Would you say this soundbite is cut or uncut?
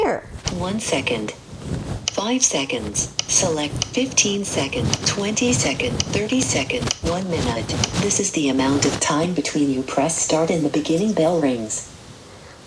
uncut